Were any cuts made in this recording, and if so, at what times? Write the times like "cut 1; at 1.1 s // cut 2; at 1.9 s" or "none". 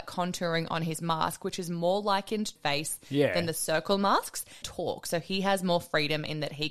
cut 1; at 2.6 s // cut 2; at 4.6 s